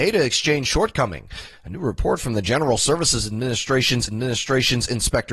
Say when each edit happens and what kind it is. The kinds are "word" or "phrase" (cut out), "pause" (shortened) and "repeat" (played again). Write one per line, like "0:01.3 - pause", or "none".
0:04.1 - repeat